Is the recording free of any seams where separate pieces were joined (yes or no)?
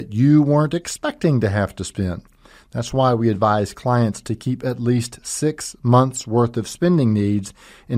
yes